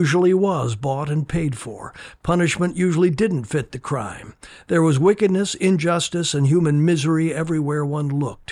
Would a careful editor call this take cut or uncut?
uncut